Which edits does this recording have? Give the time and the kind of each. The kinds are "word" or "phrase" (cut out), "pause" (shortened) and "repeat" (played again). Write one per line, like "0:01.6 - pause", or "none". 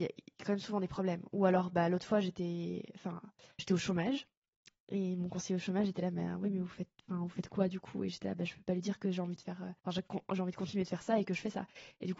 0:03.6 - word
0:09.8 - pause